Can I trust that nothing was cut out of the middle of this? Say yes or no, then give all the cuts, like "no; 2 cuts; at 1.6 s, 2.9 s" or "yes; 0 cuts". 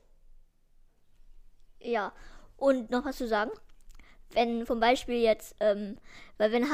yes; 0 cuts